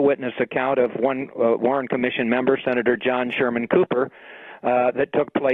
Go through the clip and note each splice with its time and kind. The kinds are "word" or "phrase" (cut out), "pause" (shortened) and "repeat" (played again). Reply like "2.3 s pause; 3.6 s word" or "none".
none